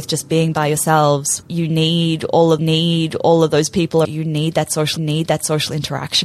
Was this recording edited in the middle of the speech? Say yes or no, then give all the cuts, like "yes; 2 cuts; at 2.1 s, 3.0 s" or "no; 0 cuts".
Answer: yes; 4 cuts; at 1.4 s, 2.6 s, 4.0 s, 5.0 s